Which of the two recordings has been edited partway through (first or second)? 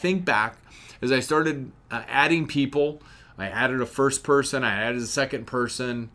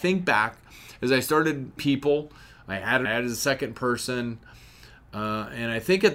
second